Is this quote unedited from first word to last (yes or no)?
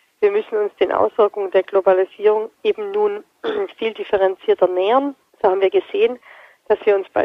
no